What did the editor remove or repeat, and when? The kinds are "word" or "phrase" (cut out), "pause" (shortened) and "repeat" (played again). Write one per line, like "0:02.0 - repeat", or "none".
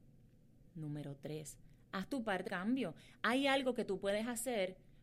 0:02.5 - word